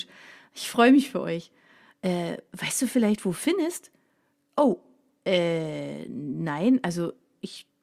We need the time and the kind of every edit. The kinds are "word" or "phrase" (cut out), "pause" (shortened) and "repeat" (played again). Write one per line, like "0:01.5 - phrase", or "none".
none